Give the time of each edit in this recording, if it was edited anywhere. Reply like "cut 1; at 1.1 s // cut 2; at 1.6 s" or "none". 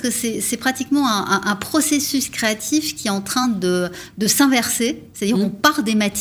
none